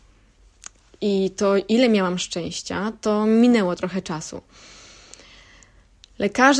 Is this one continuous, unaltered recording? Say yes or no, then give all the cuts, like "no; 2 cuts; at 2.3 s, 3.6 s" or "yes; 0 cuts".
yes; 0 cuts